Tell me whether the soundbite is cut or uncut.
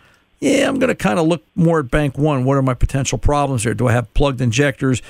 cut